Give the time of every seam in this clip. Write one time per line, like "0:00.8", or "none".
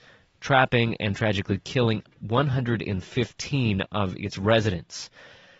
none